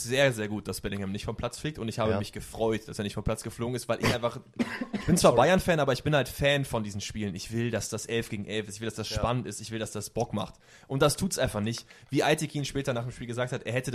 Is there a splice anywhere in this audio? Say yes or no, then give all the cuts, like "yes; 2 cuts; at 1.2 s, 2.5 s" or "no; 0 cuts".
no; 0 cuts